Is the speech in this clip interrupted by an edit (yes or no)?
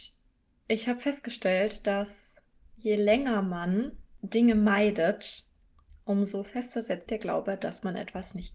yes